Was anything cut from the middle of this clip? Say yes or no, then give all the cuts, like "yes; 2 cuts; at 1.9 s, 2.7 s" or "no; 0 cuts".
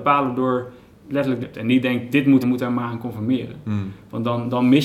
yes; 2 cuts; at 1.4 s, 2.4 s